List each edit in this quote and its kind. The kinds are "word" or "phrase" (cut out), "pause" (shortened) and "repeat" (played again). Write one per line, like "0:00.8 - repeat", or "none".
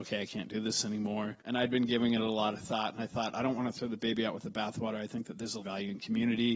0:01.4 - pause
0:05.6 - word